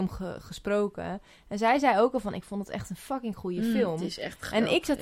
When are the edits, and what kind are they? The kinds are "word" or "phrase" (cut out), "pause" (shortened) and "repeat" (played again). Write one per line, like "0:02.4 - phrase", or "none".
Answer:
none